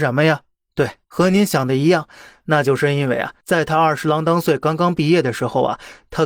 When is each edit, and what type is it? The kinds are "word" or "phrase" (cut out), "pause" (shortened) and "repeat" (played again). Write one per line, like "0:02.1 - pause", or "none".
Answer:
0:01.0 - pause
0:03.4 - pause